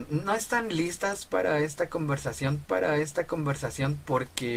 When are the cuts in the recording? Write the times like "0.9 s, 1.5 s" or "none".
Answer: 2.6 s